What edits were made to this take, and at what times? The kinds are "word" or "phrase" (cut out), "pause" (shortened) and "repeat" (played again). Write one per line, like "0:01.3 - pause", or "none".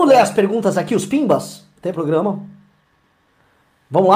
0:01.9 - phrase